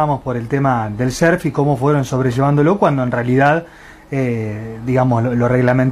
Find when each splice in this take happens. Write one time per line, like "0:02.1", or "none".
none

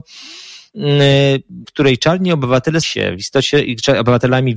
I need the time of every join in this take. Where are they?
0:01.6
0:02.8

